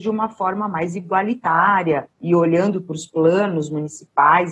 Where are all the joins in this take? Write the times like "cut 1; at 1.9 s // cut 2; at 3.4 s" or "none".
cut 1; at 2.1 s